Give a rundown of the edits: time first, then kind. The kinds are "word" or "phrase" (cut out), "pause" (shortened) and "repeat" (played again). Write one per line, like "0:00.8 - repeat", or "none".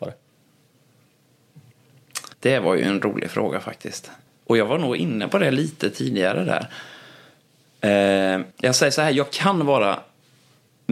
0:02.3 - pause
0:04.3 - pause
0:08.5 - pause